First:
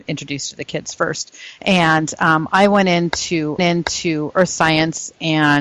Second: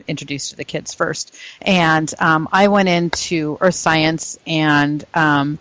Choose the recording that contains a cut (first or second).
first